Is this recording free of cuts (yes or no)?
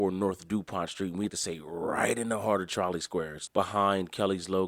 no